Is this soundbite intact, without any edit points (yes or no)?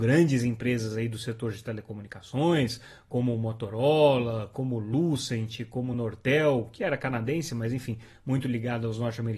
yes